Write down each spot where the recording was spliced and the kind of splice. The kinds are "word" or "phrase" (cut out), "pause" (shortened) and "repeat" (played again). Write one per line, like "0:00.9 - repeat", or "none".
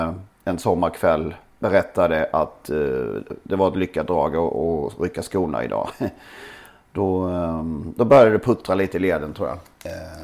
none